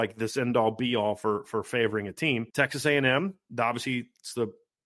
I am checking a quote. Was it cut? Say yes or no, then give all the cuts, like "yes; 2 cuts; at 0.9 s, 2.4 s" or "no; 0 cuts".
yes; 1 cut; at 2.5 s